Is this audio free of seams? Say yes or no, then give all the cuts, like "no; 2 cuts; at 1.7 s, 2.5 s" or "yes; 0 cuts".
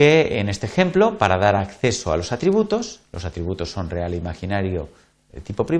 yes; 0 cuts